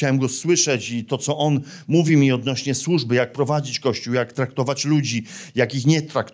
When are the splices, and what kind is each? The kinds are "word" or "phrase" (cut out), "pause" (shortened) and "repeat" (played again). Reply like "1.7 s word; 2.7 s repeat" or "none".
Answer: none